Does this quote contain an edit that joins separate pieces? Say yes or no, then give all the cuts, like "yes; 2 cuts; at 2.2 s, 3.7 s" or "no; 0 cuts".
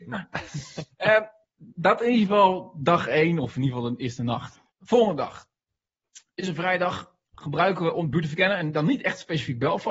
yes; 1 cut; at 4.7 s